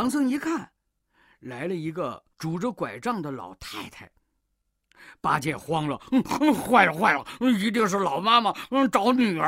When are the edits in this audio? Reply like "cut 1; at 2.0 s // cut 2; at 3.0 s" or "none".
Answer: cut 1; at 2.3 s